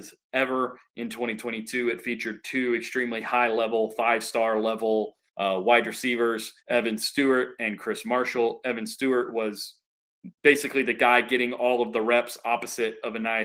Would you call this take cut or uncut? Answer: cut